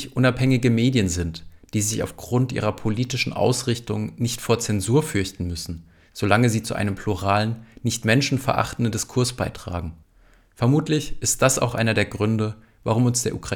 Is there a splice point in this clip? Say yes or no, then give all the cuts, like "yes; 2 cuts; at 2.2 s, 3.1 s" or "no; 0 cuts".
no; 0 cuts